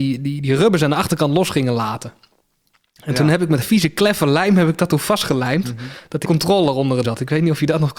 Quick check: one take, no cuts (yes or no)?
no